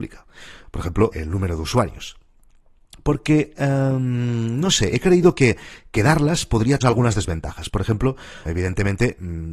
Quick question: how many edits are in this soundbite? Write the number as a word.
three